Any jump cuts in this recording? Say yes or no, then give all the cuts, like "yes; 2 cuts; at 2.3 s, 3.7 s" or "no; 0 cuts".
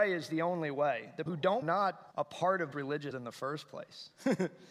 yes; 5 cuts; at 1.3 s, 1.6 s, 2.1 s, 2.7 s, 3.1 s